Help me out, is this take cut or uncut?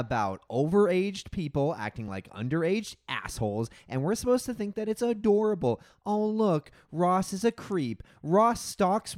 uncut